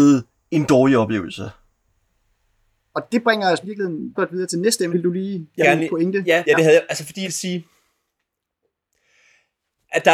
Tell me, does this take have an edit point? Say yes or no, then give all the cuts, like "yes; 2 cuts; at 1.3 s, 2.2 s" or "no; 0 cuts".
yes; 6 cuts; at 3.6 s, 4.1 s, 4.9 s, 5.6 s, 6.4 s, 7.2 s